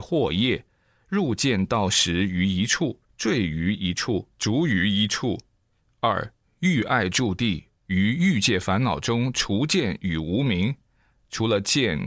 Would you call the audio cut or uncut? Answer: cut